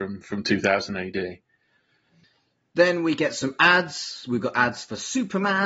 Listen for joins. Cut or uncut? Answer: uncut